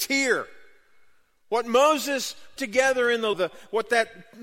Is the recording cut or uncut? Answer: cut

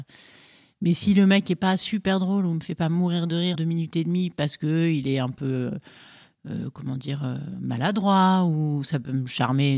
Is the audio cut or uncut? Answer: cut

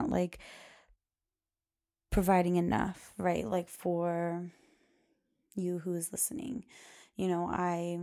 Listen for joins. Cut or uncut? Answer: uncut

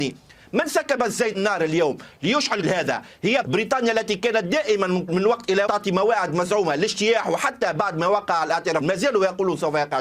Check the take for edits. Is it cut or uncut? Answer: cut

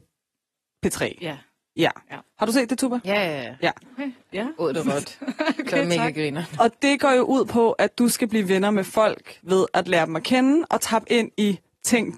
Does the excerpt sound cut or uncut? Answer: uncut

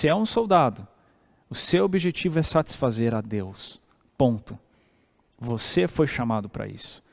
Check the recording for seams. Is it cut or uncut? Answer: uncut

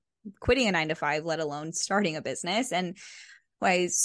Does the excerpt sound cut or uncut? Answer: uncut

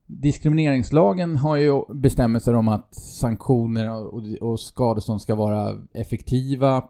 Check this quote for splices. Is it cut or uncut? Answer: uncut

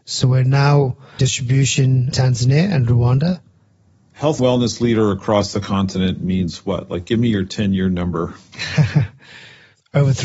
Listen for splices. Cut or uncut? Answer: cut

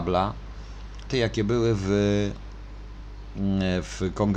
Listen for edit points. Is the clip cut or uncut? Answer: cut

